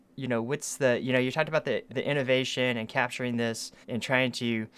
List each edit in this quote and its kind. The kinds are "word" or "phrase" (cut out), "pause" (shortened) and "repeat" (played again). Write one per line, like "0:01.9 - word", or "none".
0:01.9 - word
0:03.8 - pause